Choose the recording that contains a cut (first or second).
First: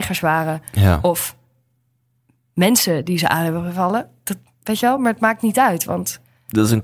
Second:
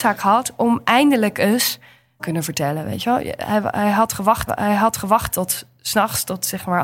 second